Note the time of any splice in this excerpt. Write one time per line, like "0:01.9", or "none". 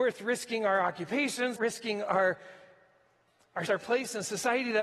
0:01.6
0:03.7